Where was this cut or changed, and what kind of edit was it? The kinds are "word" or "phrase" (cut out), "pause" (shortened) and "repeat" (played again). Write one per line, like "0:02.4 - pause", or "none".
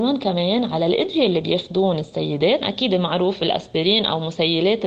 0:02.6 - word